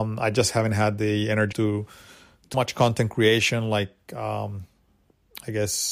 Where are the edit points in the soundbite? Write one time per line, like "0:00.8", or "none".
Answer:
0:01.5
0:02.5